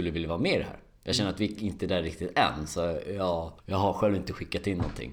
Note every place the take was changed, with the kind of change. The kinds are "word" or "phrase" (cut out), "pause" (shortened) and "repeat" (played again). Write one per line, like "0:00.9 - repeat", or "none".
0:03.6 - pause